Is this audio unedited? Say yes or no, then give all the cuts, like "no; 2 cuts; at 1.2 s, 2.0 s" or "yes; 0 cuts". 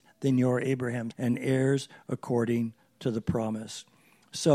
no; 1 cut; at 1.1 s